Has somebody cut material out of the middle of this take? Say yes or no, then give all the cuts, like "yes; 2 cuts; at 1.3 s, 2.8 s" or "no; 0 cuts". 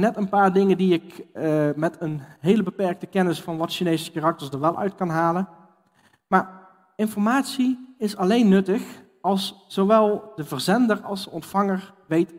no; 0 cuts